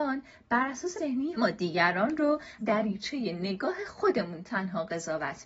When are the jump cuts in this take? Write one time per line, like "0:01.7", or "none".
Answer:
0:01.0
0:01.4
0:02.6